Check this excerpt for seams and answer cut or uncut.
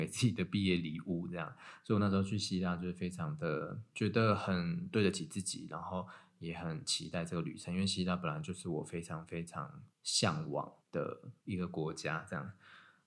cut